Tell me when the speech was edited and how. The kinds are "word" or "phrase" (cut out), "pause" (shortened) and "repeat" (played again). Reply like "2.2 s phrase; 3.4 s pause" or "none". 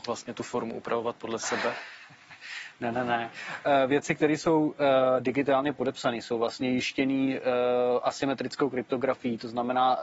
none